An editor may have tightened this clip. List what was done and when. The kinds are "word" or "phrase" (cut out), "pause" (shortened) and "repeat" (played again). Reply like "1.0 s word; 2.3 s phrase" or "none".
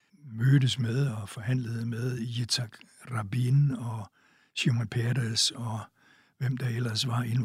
none